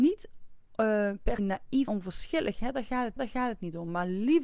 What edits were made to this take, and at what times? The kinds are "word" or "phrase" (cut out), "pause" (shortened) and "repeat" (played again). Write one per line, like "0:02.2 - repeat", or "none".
0:01.4 - word
0:01.9 - word
0:03.2 - repeat